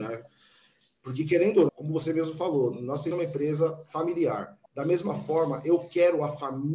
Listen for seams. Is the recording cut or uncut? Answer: cut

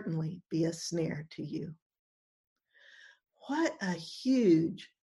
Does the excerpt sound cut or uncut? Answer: uncut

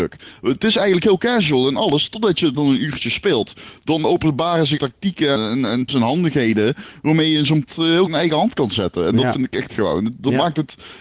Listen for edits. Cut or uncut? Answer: cut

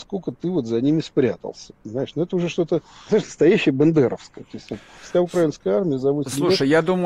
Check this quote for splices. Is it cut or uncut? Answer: cut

